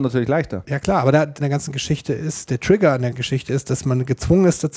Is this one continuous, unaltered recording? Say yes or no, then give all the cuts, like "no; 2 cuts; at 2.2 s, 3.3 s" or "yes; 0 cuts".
no; 2 cuts; at 1.4 s, 3.1 s